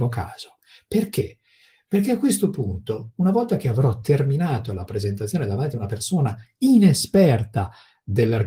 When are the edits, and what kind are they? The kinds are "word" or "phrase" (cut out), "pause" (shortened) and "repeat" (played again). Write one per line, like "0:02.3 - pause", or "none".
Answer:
none